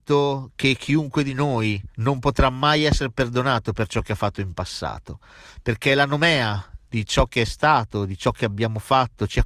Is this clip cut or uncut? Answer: cut